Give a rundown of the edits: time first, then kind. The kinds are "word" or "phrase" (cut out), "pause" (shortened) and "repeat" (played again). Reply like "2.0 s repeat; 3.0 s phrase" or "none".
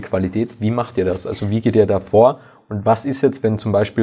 none

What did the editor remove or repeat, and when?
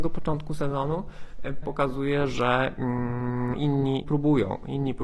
1.6 s word; 3.5 s word; 4.0 s word

